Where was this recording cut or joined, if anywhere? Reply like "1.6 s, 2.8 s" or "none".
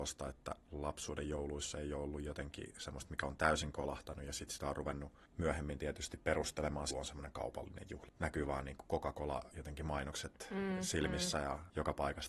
6.9 s, 8.1 s